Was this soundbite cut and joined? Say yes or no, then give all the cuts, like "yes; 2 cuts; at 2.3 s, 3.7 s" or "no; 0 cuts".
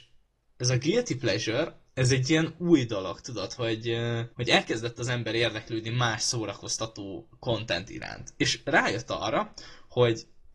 yes; 2 cuts; at 1.9 s, 4.3 s